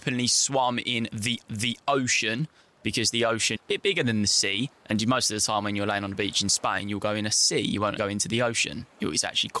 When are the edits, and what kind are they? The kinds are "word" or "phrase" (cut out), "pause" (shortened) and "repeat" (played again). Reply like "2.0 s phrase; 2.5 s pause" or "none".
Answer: 1.5 s repeat; 3.6 s word; 4.8 s pause; 8.0 s word